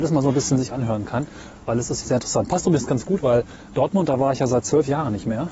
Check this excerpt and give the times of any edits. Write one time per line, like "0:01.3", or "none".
0:02.0